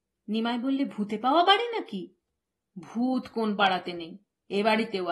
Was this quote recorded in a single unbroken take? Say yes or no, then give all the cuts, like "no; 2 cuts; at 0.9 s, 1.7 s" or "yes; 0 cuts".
yes; 0 cuts